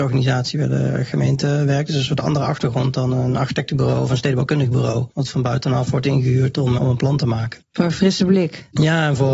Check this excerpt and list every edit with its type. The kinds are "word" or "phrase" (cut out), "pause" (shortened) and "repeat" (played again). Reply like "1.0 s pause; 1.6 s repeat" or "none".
5.1 s pause; 6.8 s word; 7.6 s pause

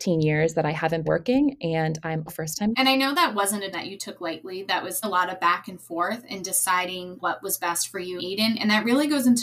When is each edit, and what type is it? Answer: 1.0 s word; 2.3 s word; 2.7 s word; 3.7 s word; 5.0 s word; 7.2 s word; 8.2 s word

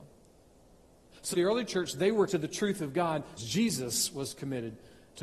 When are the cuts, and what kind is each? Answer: 1.3 s phrase; 2.3 s word; 3.4 s word

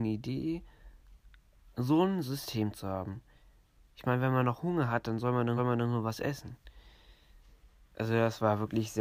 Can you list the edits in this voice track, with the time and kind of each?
5.6 s repeat

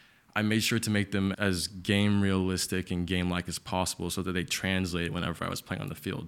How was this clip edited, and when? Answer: 1.3 s word

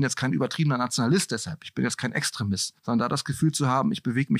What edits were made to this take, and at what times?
2.8 s pause

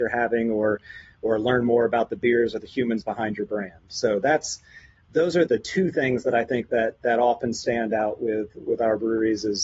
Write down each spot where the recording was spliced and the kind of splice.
5.0 s word; 5.5 s word

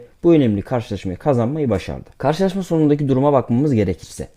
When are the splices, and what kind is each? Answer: none

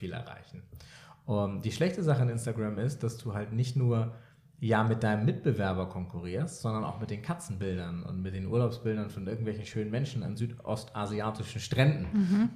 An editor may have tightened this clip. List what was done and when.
none

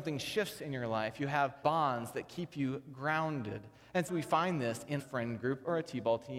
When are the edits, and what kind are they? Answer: 1.6 s word; 4.1 s word; 5.0 s word

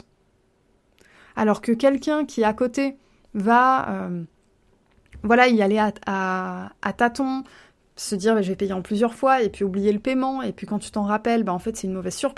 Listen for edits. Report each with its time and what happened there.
none

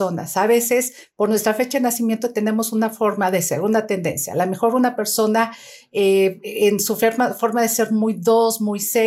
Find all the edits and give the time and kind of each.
none

